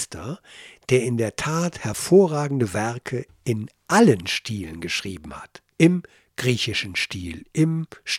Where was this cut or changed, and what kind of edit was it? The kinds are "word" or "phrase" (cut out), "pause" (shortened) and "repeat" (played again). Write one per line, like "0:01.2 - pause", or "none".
0:05.7 - pause